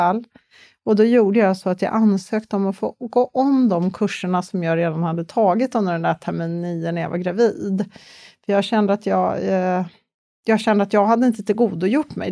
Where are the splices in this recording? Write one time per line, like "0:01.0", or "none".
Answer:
none